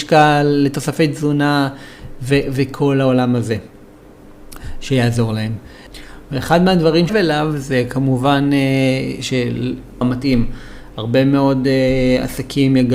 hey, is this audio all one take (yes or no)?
no